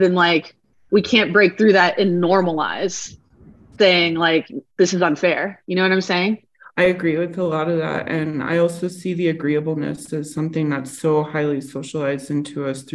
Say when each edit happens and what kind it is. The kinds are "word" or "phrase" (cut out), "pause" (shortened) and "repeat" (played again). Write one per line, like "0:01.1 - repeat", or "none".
0:04.7 - pause
0:05.6 - pause
0:06.5 - pause